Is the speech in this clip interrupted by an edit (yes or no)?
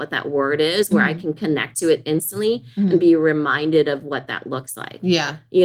no